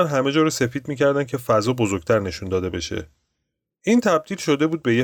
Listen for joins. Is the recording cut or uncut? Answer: uncut